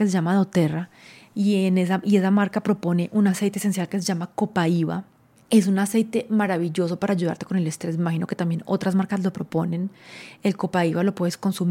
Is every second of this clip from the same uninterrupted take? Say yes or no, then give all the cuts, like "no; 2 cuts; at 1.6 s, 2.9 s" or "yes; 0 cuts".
yes; 0 cuts